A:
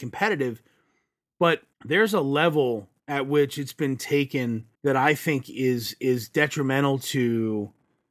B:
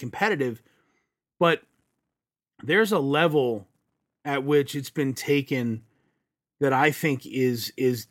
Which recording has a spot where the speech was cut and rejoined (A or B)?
A